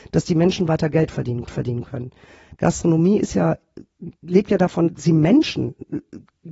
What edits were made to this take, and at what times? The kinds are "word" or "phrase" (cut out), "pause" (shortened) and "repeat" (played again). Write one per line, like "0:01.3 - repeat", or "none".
0:01.5 - repeat
0:04.1 - pause
0:04.9 - word

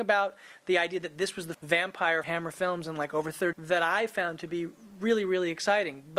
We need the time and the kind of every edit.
0:01.5 - word
0:02.2 - phrase
0:03.5 - word

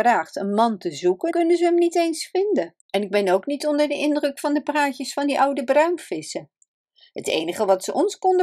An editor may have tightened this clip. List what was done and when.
0:01.3 - word
0:02.8 - pause

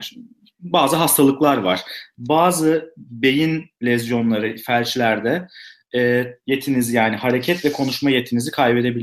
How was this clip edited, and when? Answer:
0:06.4 - word

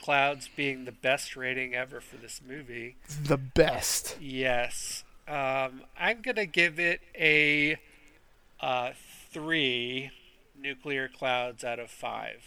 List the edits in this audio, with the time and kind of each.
0:09.3 - pause

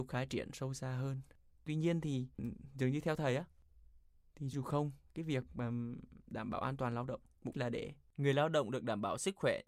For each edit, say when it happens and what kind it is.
0:04.5 - word
0:07.5 - word

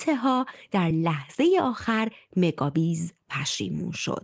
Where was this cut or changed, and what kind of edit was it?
none

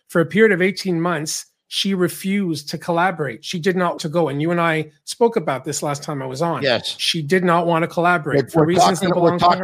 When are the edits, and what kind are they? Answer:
0:04.0 - word

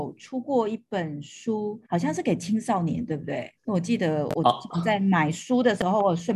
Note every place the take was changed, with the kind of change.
0:01.8 - pause
0:03.6 - pause

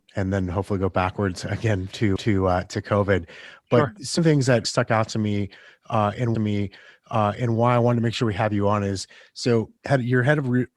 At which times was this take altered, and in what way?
0:02.2 - repeat
0:04.2 - word
0:04.6 - word
0:06.3 - repeat
0:09.8 - pause

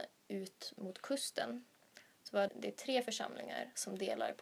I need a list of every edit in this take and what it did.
0:02.5 - word

